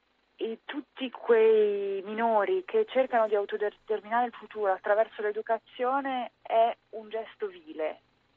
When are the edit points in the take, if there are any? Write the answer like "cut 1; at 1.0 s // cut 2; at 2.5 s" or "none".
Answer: cut 1; at 4.3 s